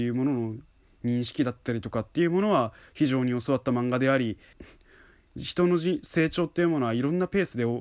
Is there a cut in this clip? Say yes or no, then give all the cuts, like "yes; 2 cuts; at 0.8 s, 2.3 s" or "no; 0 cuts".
yes; 1 cut; at 4.5 s